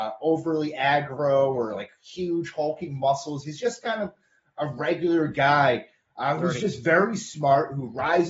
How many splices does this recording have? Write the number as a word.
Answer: zero